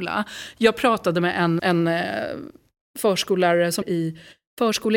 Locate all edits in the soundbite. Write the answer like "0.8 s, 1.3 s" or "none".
1.6 s, 3.8 s